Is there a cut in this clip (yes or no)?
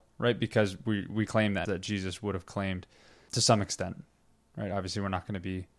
yes